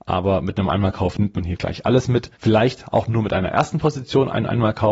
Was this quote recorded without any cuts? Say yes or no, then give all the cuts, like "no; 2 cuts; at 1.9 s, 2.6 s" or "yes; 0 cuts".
no; 1 cut; at 2.3 s